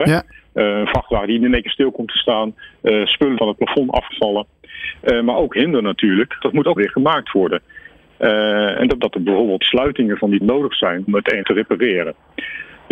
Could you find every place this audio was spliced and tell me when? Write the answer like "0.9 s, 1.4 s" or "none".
3.4 s, 4.1 s, 6.4 s, 6.8 s, 9.0 s, 9.6 s, 10.4 s, 11.1 s, 11.4 s